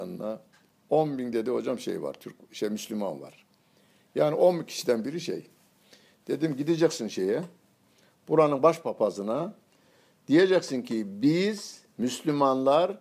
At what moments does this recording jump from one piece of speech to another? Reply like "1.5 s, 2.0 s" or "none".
none